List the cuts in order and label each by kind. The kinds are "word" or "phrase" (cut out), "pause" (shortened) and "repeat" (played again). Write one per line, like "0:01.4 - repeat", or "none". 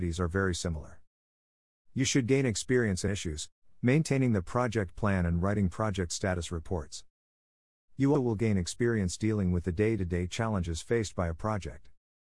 0:03.1 - phrase
0:08.1 - word